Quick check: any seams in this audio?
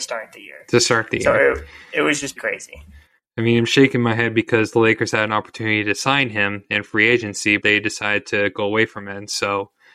yes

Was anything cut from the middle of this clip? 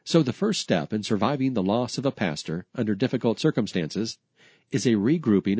no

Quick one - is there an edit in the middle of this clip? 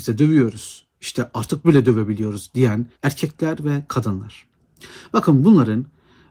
yes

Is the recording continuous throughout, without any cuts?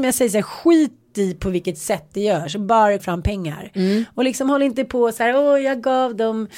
no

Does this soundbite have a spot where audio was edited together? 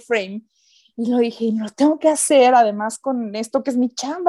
no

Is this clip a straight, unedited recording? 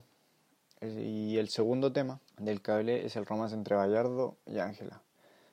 no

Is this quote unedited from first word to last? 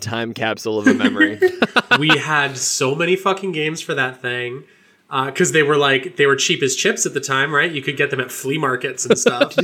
yes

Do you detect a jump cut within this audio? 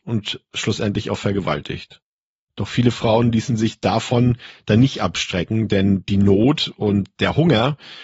no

